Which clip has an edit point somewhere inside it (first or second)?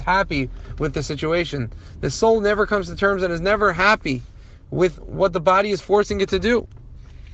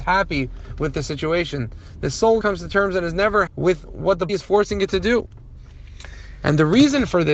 second